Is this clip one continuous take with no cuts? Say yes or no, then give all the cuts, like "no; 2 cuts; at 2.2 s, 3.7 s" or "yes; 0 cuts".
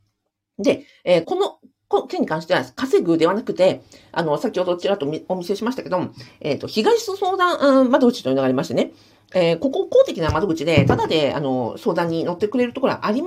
no; 1 cut; at 1.2 s